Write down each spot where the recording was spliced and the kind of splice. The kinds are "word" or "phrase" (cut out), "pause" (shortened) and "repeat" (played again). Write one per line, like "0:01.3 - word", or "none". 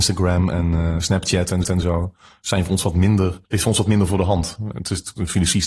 0:01.6 - repeat
0:03.4 - pause